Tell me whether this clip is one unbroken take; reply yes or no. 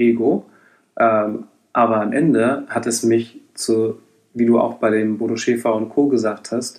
yes